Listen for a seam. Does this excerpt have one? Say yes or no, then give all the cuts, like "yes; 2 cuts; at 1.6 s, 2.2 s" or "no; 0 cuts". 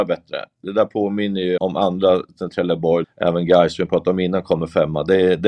yes; 2 cuts; at 1.6 s, 3.0 s